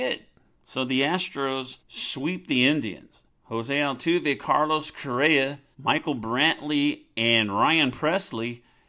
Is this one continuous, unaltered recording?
no; 3 cuts; at 1.8 s, 3.3 s, 5.7 s

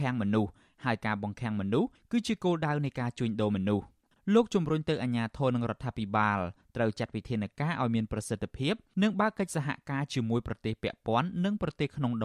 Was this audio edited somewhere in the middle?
no; 0 cuts

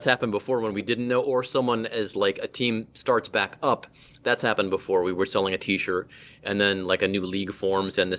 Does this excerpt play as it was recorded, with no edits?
yes; 0 cuts

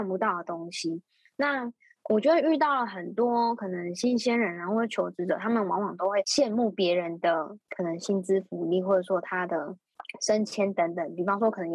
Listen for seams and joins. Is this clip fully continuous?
yes; 0 cuts

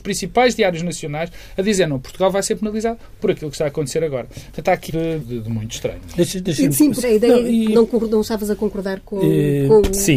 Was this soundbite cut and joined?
yes; 3 cuts; at 4.9 s, 5.2 s, 7.0 s

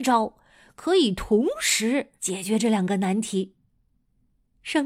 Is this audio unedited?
no; 1 cut; at 2.2 s

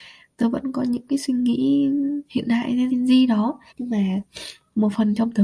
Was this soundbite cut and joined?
yes; 3 cuts; at 2.3 s, 2.9 s, 3.7 s

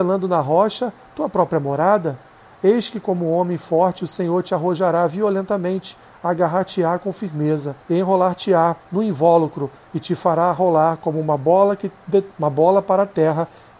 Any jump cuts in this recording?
yes; 3 cuts; at 7.8 s, 8.8 s, 12.3 s

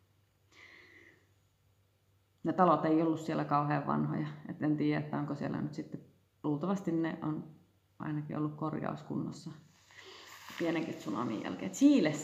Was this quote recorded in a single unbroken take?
yes; 0 cuts

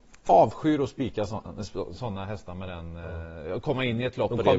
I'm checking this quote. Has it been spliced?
no; 0 cuts

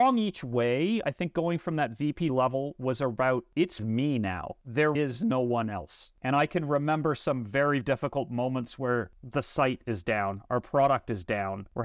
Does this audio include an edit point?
yes; 4 cuts; at 2.3 s, 3.8 s, 4.9 s, 7.8 s

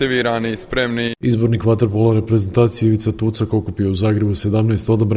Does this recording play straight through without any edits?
yes; 0 cuts

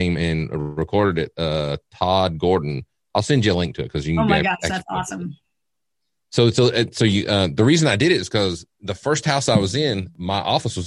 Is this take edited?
no; 0 cuts

